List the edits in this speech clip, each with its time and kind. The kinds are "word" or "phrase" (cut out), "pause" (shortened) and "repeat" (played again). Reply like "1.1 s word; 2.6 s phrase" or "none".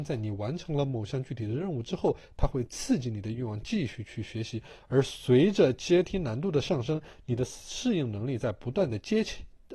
none